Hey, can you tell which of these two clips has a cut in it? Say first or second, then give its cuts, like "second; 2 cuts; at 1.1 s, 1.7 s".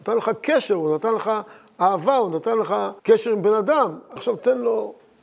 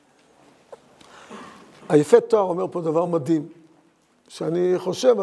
first; 2 cuts; at 3.0 s, 4.2 s